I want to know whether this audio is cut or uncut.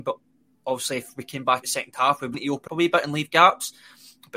cut